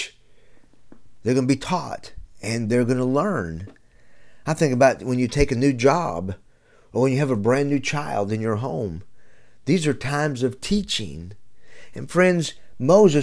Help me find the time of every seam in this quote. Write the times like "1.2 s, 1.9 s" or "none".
none

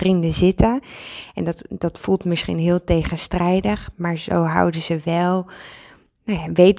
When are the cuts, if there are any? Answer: none

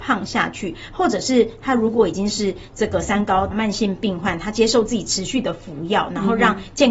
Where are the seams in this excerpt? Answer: 3.5 s

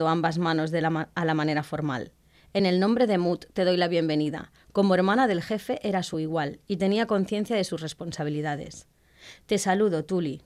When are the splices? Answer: none

